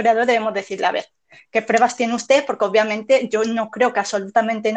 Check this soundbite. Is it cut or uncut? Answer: uncut